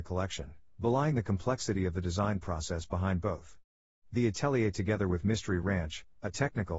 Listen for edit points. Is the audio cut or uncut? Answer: uncut